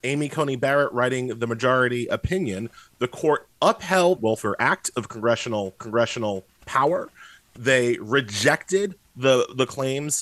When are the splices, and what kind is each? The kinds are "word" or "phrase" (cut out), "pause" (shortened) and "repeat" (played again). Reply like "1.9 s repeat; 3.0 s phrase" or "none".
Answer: 4.2 s phrase; 4.9 s phrase; 5.8 s repeat